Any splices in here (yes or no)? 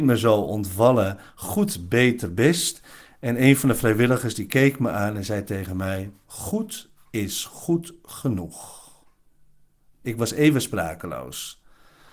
no